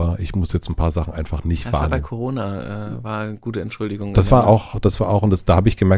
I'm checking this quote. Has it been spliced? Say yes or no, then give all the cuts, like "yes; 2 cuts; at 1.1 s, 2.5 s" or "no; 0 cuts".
no; 0 cuts